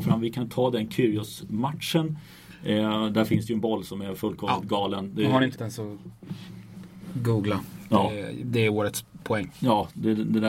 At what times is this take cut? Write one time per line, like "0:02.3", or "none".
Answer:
0:05.5